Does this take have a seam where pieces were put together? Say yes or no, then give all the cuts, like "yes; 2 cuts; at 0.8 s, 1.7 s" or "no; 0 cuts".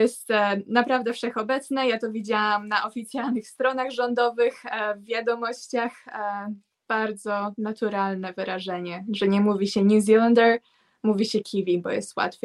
no; 0 cuts